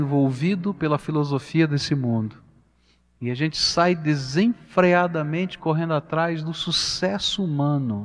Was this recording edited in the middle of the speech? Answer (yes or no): no